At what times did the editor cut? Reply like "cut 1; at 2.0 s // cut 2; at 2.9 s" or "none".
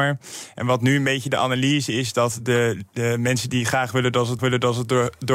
cut 1; at 4.4 s